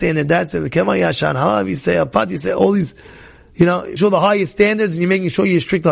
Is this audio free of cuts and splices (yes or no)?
no